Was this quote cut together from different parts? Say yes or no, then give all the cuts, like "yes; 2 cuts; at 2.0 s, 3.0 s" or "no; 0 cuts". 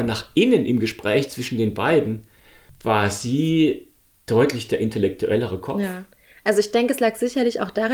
no; 0 cuts